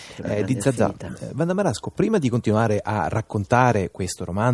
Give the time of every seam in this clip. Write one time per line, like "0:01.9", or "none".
none